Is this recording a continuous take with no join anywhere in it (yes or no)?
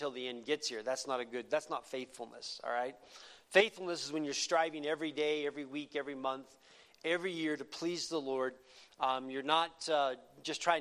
yes